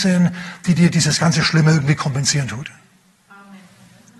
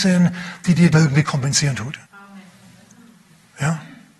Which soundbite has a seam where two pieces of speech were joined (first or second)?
second